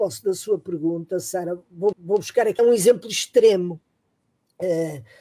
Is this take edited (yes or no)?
yes